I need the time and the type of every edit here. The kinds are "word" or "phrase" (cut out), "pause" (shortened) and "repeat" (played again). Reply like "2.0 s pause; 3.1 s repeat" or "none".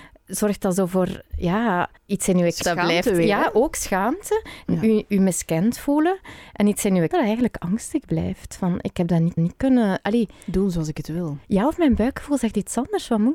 2.0 s pause; 2.6 s word; 7.1 s word; 9.4 s repeat; 11.4 s pause